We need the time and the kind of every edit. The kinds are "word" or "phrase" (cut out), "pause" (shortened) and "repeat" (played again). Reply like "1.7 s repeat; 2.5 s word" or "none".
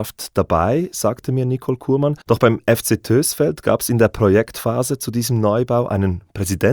2.2 s pause